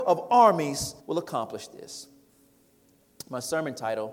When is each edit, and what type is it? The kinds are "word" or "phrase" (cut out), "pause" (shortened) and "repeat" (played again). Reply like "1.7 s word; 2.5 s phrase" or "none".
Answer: 1.0 s pause